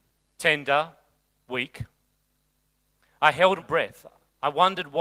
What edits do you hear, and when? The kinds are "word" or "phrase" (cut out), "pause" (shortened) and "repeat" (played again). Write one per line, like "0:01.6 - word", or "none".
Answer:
0:03.6 - word